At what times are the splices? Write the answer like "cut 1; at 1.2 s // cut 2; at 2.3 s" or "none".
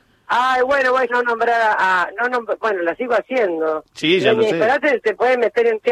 cut 1; at 1.1 s